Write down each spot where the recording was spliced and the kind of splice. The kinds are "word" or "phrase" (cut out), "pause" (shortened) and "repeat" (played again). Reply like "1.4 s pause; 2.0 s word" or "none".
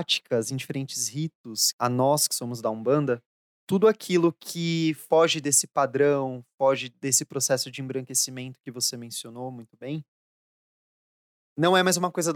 3.4 s pause

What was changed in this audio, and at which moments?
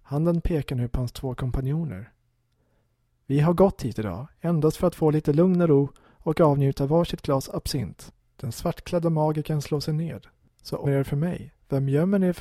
8.2 s pause; 10.8 s phrase

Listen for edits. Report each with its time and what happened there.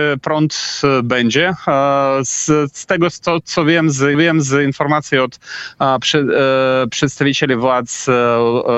4.1 s repeat

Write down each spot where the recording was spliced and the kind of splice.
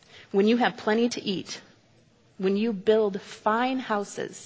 none

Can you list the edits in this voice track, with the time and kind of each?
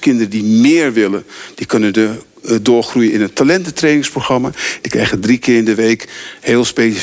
none

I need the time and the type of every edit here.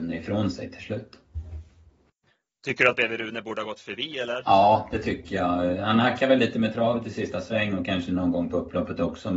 none

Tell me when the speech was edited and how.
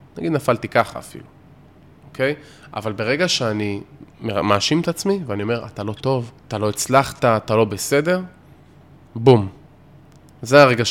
4.1 s pause; 6.4 s pause

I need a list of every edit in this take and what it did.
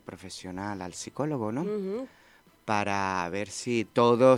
none

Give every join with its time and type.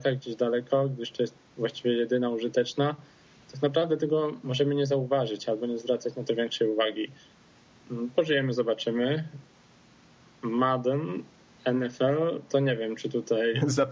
none

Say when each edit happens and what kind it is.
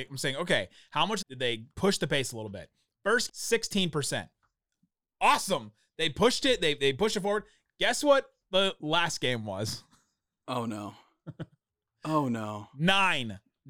1.2 s phrase; 3.3 s word

